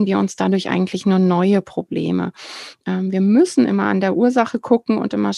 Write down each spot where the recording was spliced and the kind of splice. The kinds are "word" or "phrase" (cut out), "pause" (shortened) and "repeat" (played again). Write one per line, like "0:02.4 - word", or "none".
none